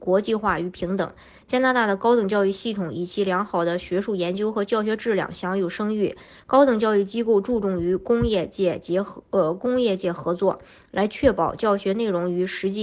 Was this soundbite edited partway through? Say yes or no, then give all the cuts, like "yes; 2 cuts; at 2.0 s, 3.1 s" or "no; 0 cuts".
no; 0 cuts